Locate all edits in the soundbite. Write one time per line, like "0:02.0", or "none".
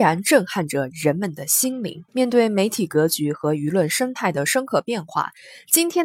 0:02.1